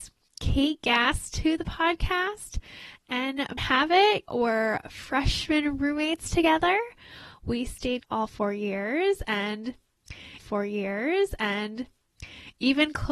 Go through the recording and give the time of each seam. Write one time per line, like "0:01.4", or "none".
0:03.6
0:04.3
0:08.0
0:10.4